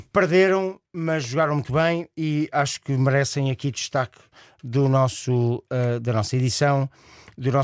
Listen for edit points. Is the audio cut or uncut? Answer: uncut